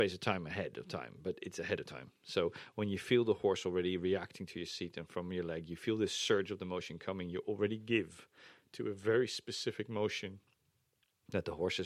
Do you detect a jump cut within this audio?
no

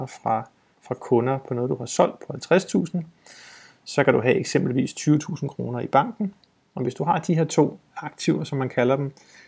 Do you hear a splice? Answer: no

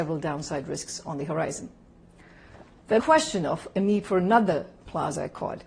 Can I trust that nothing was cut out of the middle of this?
no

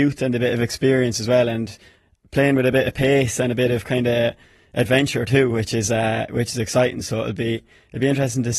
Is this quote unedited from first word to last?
yes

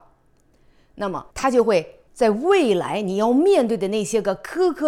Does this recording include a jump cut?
yes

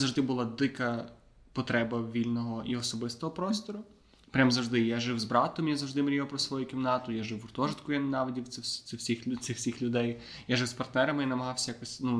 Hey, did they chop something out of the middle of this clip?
no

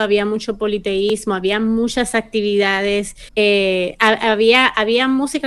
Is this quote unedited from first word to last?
no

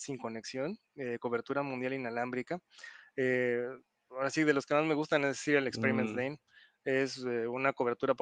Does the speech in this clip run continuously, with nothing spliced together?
yes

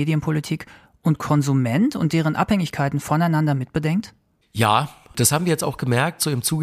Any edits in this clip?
no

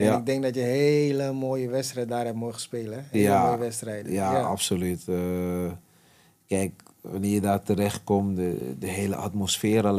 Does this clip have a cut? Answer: no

